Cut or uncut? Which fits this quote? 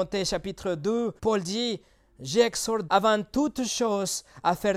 cut